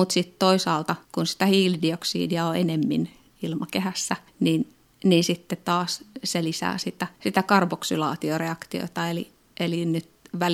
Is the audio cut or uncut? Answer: cut